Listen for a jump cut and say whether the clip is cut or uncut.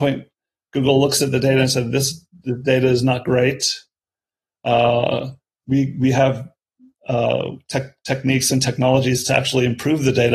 uncut